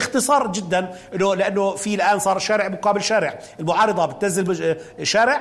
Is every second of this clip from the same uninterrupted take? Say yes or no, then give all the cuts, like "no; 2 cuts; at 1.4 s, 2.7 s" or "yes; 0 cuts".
yes; 0 cuts